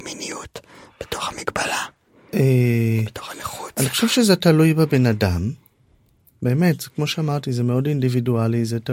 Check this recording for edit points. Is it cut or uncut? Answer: uncut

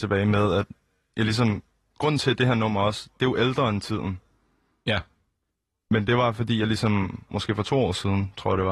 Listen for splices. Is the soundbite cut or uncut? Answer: uncut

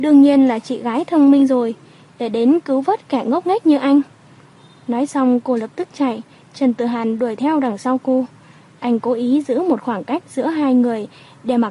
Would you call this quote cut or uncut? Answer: uncut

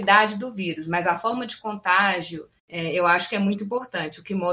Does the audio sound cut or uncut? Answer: cut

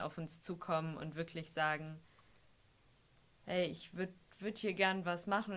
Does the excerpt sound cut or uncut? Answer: uncut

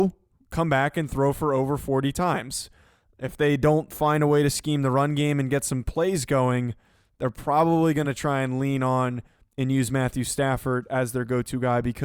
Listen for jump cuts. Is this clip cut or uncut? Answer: uncut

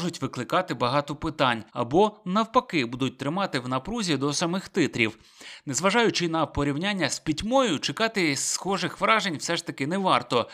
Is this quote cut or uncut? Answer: cut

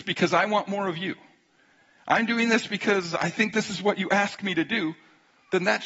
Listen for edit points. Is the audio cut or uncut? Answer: uncut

